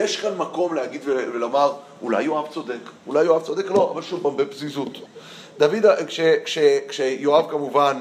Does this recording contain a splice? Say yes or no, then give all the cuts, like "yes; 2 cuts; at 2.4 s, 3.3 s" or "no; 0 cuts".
yes; 1 cut; at 3.0 s